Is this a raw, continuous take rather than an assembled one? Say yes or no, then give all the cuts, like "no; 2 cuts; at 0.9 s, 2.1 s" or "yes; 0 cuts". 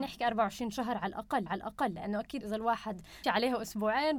no; 3 cuts; at 1.5 s, 2.4 s, 3.2 s